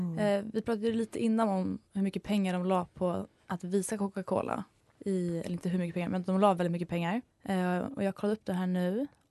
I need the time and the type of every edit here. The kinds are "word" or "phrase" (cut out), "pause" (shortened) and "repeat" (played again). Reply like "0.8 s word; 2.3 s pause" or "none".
4.8 s pause; 7.3 s pause